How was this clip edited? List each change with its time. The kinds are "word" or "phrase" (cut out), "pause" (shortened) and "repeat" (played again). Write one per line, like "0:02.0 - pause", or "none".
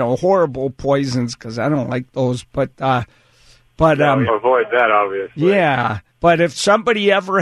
0:04.3 - phrase
0:06.1 - pause